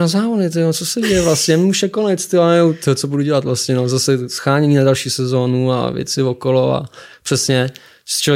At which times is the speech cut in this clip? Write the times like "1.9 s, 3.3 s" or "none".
none

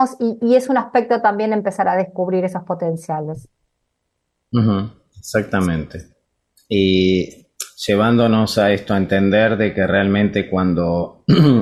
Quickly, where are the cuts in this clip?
none

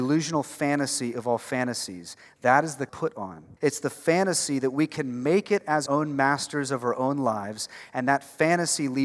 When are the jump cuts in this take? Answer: 2.9 s, 3.6 s, 5.9 s

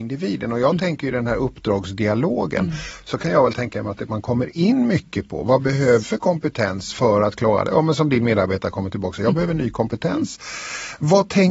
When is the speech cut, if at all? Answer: 6.0 s

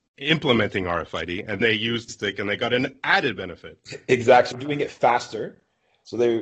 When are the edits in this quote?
1.6 s, 2.1 s, 4.5 s

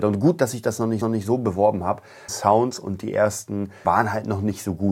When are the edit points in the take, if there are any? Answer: 1.0 s, 2.3 s, 3.8 s

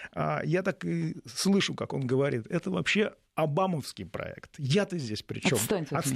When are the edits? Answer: 3.2 s

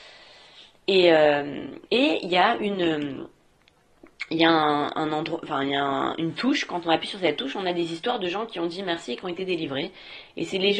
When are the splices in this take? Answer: 1.8 s

